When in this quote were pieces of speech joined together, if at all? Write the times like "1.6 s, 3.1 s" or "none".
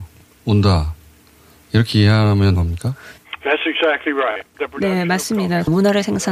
2.6 s